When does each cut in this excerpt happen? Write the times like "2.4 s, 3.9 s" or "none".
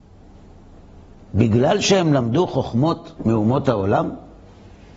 3.2 s